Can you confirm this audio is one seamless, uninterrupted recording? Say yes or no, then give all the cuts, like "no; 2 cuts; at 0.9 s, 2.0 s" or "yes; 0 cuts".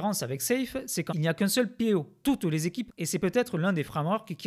no; 3 cuts; at 1.1 s, 2.2 s, 2.9 s